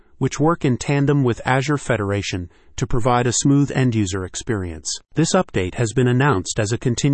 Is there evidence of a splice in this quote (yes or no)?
no